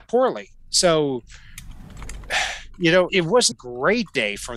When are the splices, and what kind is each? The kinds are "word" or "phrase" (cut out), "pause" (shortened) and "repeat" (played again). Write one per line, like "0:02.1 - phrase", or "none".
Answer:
0:03.1 - word
0:03.5 - word